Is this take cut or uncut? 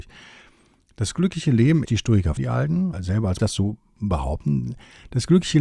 cut